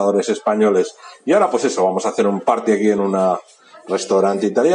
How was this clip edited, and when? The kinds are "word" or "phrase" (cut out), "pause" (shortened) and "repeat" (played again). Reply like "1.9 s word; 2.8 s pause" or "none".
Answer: none